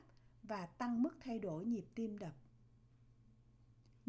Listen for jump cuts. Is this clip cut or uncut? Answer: uncut